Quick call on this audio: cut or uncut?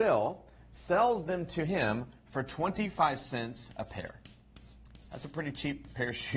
uncut